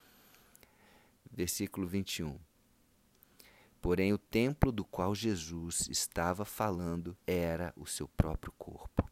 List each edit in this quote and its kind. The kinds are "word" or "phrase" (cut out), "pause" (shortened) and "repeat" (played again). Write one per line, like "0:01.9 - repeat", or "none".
0:07.2 - pause